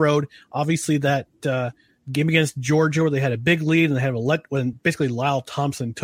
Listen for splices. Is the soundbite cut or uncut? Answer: uncut